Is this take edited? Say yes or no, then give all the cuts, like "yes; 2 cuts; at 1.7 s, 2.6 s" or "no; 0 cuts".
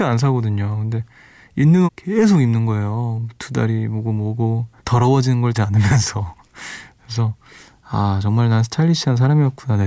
yes; 3 cuts; at 1.9 s, 4.8 s, 5.5 s